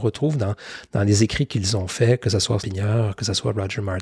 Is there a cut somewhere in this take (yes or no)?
yes